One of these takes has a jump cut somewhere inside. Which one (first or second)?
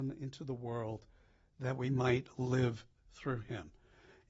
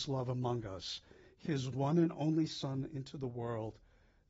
second